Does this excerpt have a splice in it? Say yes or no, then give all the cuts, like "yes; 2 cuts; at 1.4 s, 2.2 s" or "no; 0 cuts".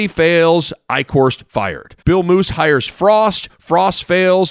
yes; 1 cut; at 2.0 s